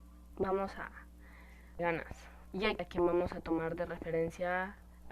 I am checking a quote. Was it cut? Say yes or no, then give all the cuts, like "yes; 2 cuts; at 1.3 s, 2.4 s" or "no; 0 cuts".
yes; 3 cuts; at 1.8 s, 2.5 s, 2.8 s